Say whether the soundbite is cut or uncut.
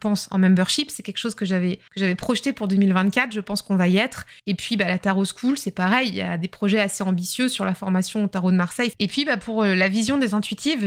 cut